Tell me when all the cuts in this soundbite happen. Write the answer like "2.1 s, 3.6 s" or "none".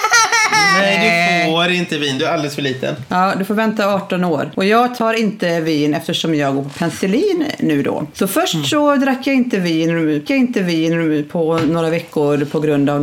10.3 s

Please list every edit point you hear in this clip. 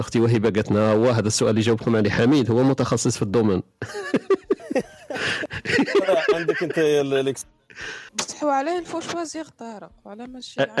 8.1 s

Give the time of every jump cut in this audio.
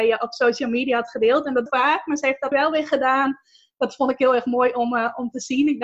1.7 s, 2.5 s

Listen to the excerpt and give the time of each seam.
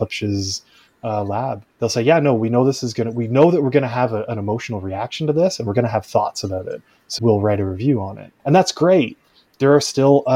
1.7 s, 7.2 s

